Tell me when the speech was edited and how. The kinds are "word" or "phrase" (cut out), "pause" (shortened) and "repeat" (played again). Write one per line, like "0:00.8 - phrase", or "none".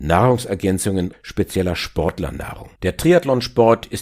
0:01.1 - word
0:02.8 - pause